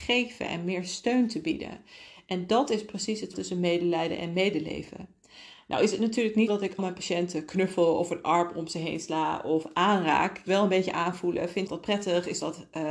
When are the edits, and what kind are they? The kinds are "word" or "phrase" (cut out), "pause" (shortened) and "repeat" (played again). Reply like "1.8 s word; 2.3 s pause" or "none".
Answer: 3.3 s word; 6.5 s word; 6.8 s word; 10.5 s word; 11.7 s word